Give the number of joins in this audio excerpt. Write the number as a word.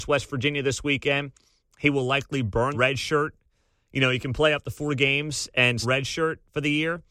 two